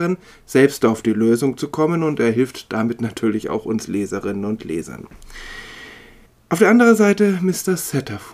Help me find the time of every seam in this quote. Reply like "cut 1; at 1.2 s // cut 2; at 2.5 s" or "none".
cut 1; at 6.3 s